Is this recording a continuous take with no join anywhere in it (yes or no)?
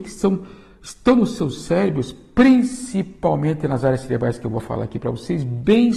yes